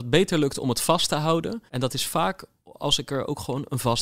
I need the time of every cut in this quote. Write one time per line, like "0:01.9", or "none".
0:01.7